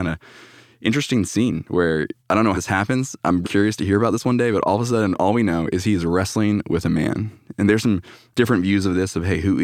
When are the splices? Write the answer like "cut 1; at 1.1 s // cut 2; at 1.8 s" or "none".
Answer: cut 1; at 2.2 s // cut 2; at 2.5 s // cut 3; at 3.4 s // cut 4; at 8.3 s